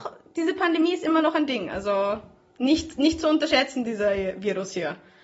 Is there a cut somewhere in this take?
no; 0 cuts

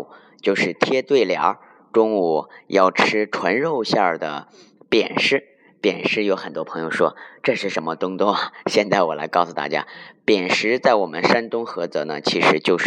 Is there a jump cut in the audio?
no; 0 cuts

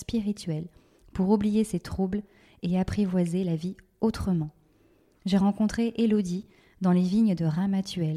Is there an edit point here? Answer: no; 0 cuts

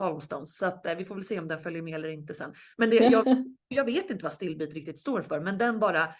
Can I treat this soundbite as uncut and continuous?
yes; 0 cuts

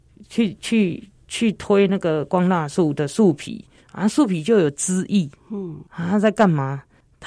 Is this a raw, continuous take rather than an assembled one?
no; 2 cuts; at 3.8 s, 5.9 s

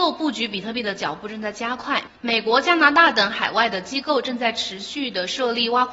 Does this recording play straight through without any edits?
no; 1 cut; at 2.2 s

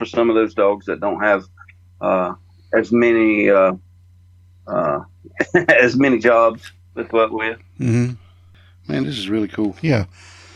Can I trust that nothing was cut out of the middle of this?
no; 1 cut; at 7.1 s

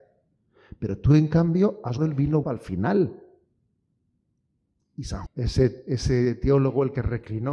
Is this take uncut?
no; 4 cuts; at 2.0 s, 2.4 s, 4.0 s, 5.3 s

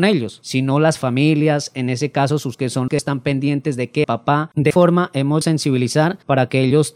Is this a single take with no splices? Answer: no; 5 cuts; at 2.5 s, 2.9 s, 4.0 s, 4.7 s, 5.4 s

